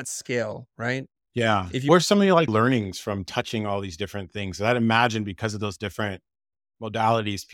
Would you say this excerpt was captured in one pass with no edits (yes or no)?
no